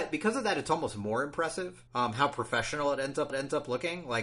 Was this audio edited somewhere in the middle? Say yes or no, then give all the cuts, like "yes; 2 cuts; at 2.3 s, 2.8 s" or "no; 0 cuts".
yes; 2 cuts; at 1.9 s, 3.3 s